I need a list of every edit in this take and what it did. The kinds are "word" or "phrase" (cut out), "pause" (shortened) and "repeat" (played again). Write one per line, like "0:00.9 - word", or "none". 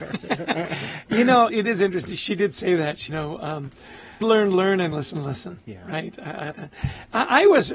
0:01.5 - word
0:03.1 - phrase
0:04.2 - word
0:04.9 - word
0:06.5 - word